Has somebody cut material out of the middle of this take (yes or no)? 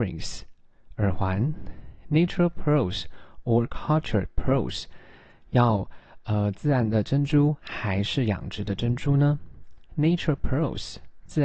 no